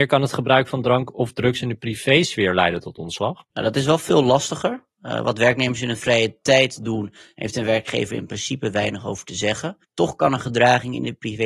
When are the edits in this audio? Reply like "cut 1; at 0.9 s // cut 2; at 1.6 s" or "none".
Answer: cut 1; at 3.5 s // cut 2; at 9.8 s